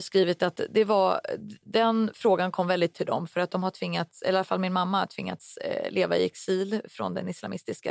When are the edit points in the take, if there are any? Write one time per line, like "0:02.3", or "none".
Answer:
0:02.9